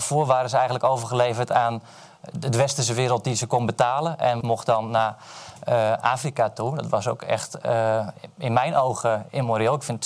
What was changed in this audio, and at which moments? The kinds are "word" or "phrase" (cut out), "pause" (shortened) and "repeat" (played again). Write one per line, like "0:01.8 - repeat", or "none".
0:04.4 - phrase